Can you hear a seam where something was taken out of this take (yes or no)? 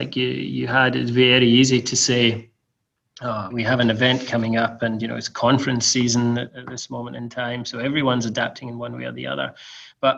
yes